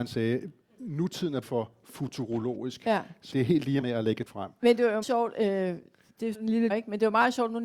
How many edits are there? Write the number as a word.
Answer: seven